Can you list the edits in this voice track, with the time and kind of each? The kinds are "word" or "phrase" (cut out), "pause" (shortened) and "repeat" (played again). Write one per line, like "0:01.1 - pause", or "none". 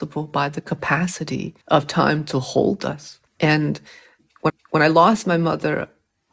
0:01.6 - pause
0:03.3 - pause
0:04.5 - repeat